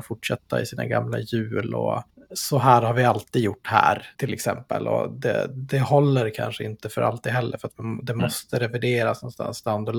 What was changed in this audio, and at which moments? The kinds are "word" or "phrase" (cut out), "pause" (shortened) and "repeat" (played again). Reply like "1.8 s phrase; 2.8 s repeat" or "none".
2.1 s pause; 4.1 s pause